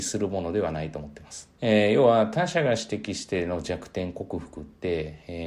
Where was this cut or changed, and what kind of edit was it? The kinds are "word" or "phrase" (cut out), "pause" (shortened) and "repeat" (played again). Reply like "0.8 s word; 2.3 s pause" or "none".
1.6 s pause